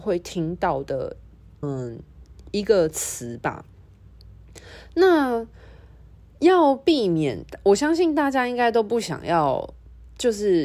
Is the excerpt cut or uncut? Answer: cut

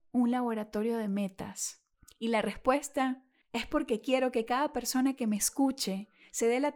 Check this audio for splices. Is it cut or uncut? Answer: uncut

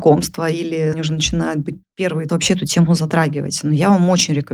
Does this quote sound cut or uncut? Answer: cut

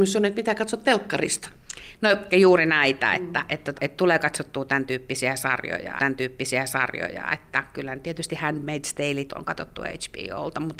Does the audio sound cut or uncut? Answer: cut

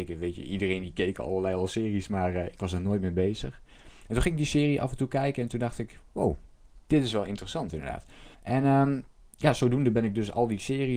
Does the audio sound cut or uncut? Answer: cut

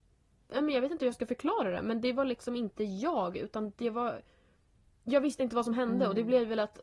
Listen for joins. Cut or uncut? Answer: uncut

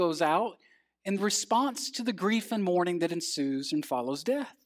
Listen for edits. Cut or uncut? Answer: uncut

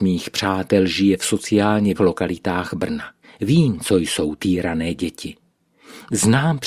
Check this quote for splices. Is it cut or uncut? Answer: cut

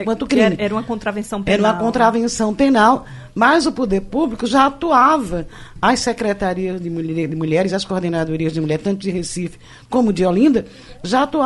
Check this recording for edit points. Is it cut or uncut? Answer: uncut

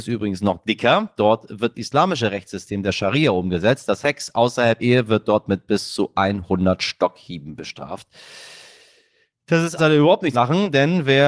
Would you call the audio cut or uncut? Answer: cut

